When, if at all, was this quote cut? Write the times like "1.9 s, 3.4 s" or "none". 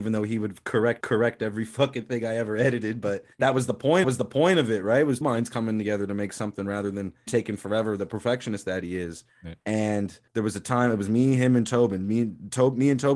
1.0 s, 3.3 s, 4.0 s, 5.2 s, 7.3 s, 9.3 s, 10.3 s